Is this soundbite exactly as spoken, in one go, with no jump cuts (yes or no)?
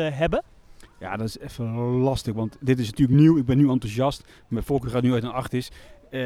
yes